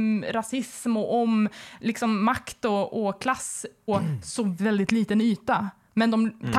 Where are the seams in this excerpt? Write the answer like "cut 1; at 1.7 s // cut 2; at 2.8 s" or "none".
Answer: cut 1; at 3.9 s // cut 2; at 4.6 s